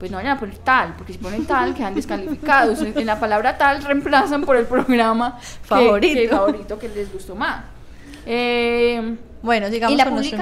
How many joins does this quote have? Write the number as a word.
zero